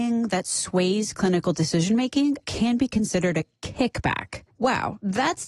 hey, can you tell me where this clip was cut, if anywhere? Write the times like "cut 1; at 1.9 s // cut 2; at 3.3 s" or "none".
none